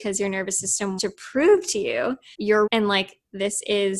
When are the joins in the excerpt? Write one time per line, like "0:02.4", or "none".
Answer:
0:01.0
0:02.3
0:02.7